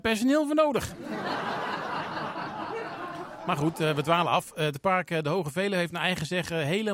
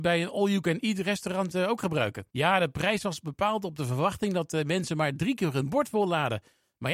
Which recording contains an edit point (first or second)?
second